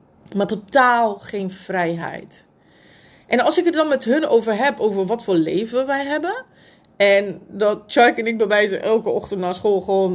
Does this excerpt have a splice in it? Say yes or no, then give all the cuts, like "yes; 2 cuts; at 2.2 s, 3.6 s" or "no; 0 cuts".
no; 0 cuts